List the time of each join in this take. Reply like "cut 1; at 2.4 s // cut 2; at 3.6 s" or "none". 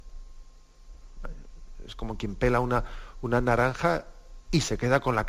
none